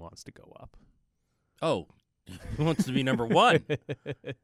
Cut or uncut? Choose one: uncut